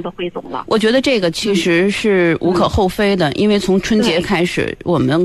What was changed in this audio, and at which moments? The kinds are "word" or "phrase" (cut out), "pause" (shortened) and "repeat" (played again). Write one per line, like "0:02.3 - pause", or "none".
none